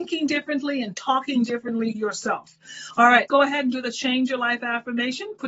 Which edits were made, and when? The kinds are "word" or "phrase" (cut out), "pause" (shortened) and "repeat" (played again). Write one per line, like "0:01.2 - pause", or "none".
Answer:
0:01.9 - word
0:03.3 - word